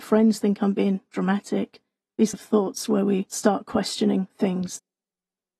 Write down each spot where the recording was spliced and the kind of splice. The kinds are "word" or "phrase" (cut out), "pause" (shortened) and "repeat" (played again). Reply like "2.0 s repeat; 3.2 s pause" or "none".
2.3 s word